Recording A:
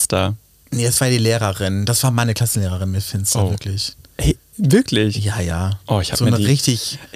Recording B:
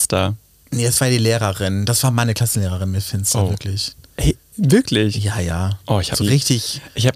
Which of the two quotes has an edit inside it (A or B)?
B